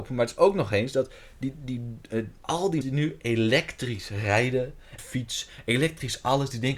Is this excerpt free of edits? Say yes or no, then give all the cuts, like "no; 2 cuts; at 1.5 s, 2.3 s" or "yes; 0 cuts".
no; 3 cuts; at 2.4 s, 2.8 s, 5.0 s